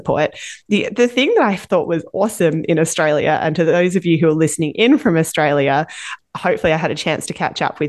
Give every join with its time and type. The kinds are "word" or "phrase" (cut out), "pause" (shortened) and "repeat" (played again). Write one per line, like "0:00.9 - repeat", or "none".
none

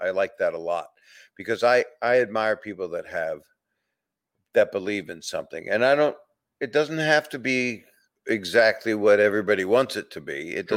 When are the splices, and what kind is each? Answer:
none

